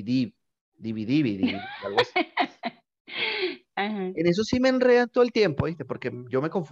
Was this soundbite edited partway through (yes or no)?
no